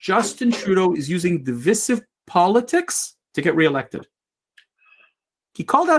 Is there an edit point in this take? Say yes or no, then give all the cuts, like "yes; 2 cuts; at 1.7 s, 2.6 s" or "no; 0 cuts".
yes; 1 cut; at 3.2 s